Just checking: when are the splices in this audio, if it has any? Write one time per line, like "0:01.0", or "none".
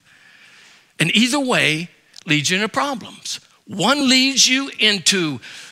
none

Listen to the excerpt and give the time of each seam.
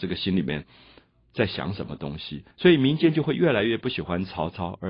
0:02.5

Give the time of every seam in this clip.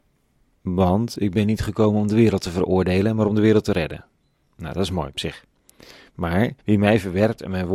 0:06.6

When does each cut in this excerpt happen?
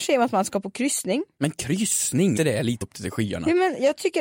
0:02.4
0:02.8

